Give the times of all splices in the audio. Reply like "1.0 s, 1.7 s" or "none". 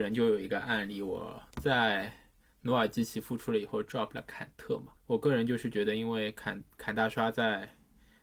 1.5 s, 5.0 s

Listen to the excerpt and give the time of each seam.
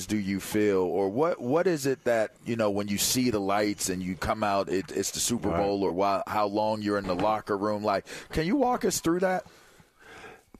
2.4 s

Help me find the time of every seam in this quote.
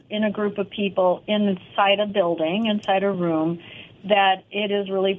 none

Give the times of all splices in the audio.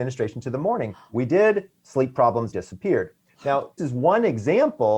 1.8 s, 2.5 s, 3.8 s

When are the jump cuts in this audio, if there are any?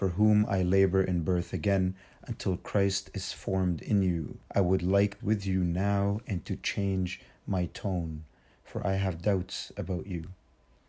4.5 s, 5.2 s

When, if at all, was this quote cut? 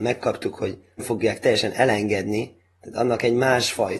1.0 s

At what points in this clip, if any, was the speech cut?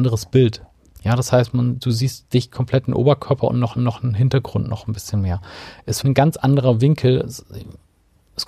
3.8 s, 6.0 s

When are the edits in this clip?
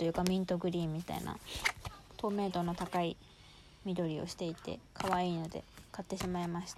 4.8 s

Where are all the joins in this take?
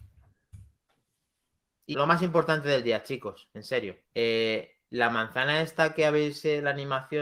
1.9 s, 4.0 s

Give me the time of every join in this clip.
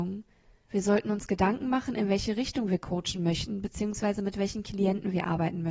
none

